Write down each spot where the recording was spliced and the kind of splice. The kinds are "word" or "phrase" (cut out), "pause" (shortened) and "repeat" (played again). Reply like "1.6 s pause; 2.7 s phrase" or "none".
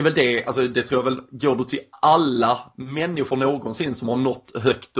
none